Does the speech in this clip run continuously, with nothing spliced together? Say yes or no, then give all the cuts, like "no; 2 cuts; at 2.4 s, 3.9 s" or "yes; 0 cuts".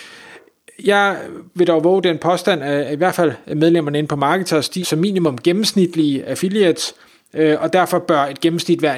no; 1 cut; at 4.8 s